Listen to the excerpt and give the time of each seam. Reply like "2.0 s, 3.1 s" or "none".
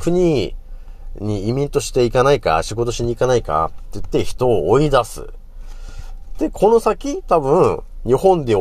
none